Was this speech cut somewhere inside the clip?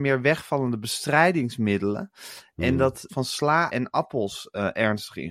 yes; 2 cuts; at 3.1 s, 3.7 s

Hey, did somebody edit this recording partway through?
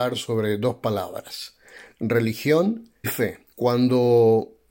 yes; 2 cuts; at 3.0 s, 3.5 s

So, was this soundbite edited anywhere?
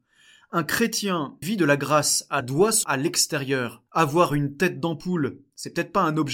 yes; 4 cuts; at 1.4 s, 2.4 s, 2.8 s, 3.9 s

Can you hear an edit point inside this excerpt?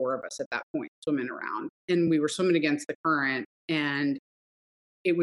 no; 0 cuts

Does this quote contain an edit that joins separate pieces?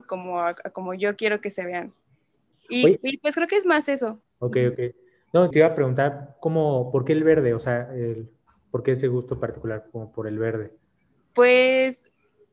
yes; 2 cuts; at 4.2 s, 5.5 s

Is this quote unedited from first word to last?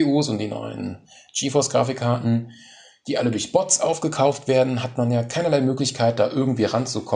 yes; 0 cuts

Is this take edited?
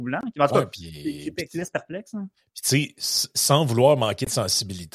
no; 0 cuts

